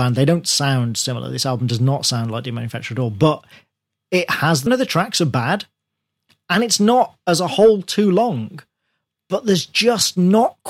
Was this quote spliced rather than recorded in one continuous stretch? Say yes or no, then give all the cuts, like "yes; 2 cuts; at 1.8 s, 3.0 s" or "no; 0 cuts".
yes; 1 cut; at 4.7 s